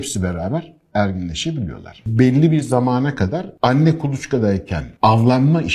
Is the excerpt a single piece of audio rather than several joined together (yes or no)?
yes